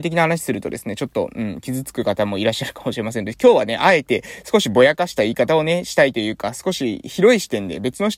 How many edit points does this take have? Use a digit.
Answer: 0